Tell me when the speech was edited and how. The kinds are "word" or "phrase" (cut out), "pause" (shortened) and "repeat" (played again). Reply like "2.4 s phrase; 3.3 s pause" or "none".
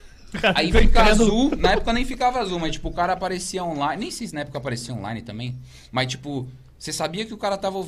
none